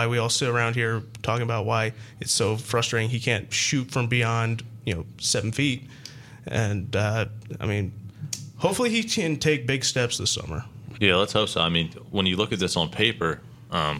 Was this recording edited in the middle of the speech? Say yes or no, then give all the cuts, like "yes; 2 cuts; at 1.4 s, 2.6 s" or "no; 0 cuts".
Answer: yes; 1 cut; at 11.0 s